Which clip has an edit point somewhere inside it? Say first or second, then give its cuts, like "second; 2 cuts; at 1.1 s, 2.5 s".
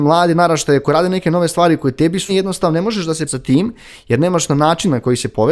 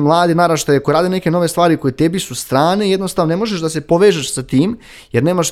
first; 2 cuts; at 2.3 s, 3.3 s